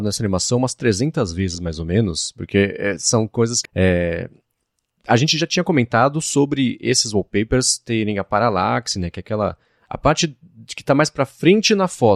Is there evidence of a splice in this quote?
yes; 1 cut; at 3.6 s

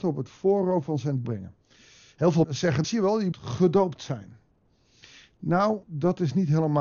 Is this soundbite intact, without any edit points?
no; 5 cuts; at 1.2 s, 2.4 s, 2.8 s, 3.3 s, 5.8 s

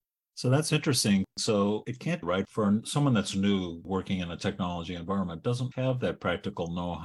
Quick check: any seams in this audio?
yes; 2 cuts; at 2.2 s, 5.7 s

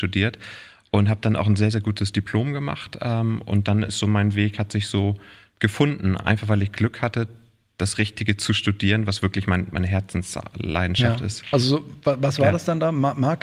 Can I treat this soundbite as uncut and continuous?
yes; 0 cuts

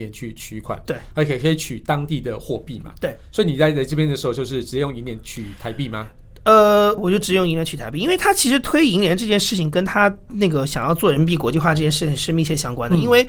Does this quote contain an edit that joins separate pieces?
yes; 1 cut; at 7.0 s

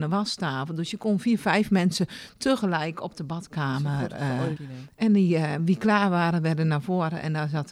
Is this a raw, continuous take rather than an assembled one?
no; 1 cut; at 4.6 s

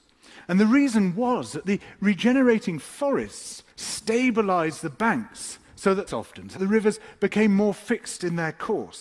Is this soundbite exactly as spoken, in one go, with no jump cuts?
no; 3 cuts; at 3.7 s, 6.1 s, 6.6 s

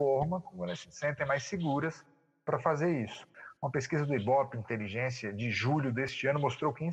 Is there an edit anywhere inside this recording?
no; 0 cuts

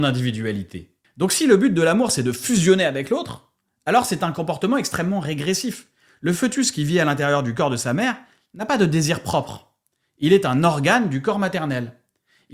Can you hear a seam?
no; 0 cuts

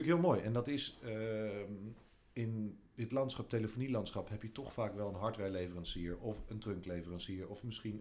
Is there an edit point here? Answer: no; 0 cuts

